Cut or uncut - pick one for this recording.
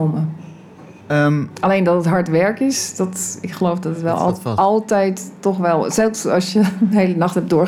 cut